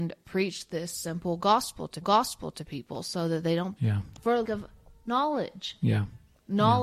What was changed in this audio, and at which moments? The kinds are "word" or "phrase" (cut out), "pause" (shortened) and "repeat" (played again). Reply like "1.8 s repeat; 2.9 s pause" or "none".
2.0 s repeat; 3.8 s word; 4.4 s word